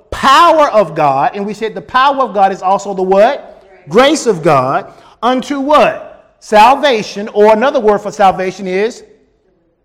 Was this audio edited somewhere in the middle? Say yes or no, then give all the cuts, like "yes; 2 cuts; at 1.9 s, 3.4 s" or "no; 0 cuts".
no; 0 cuts